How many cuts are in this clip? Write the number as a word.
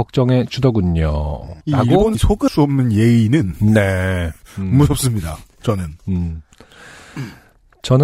three